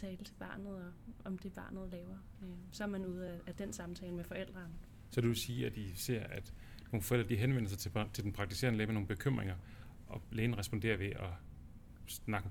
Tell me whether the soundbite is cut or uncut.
uncut